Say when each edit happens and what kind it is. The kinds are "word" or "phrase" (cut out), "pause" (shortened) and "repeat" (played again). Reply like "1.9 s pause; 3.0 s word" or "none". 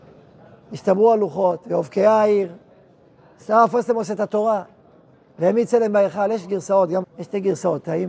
7.0 s word